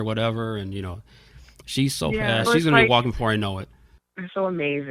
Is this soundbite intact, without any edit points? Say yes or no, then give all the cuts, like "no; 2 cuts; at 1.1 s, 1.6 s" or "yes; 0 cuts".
no; 1 cut; at 2.5 s